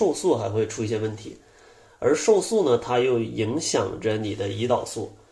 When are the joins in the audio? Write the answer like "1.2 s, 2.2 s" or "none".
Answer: none